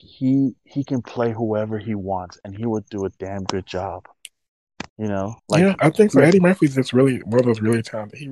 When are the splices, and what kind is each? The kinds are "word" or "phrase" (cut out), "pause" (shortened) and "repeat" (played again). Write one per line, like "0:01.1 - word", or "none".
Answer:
0:04.9 - pause
0:05.4 - pause